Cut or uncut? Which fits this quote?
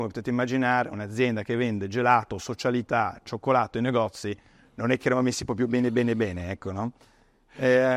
uncut